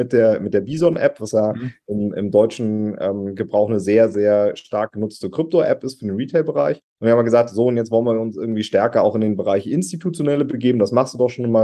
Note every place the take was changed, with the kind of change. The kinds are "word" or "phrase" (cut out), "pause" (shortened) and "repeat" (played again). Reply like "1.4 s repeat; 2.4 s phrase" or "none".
6.9 s pause